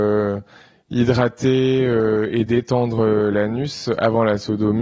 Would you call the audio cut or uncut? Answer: uncut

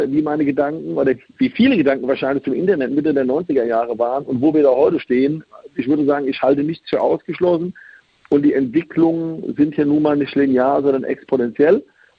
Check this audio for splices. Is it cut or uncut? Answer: uncut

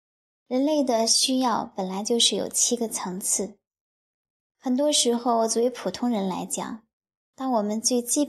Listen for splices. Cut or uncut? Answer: uncut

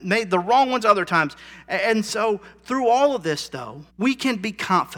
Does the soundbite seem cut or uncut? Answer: cut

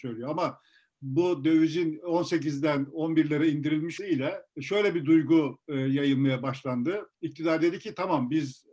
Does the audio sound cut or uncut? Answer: cut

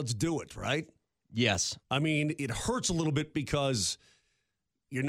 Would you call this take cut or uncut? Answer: cut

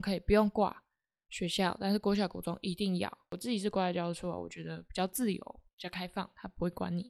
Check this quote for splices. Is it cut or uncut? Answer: cut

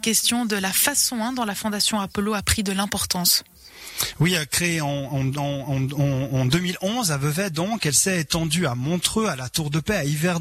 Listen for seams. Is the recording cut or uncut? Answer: cut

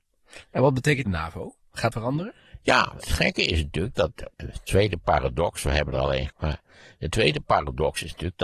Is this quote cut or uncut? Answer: cut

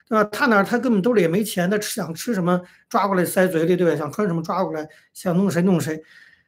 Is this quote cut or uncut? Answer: uncut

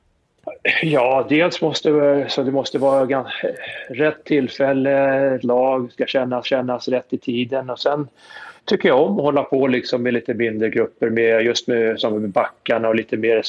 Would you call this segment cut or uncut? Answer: cut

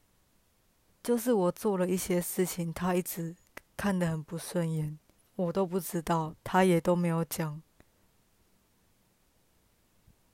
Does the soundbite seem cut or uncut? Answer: cut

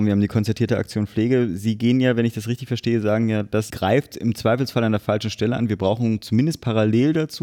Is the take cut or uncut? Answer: uncut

